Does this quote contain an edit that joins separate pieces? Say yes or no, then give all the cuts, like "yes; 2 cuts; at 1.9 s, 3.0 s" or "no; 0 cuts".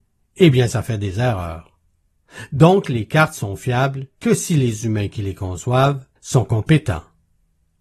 yes; 2 cuts; at 4.1 s, 6.2 s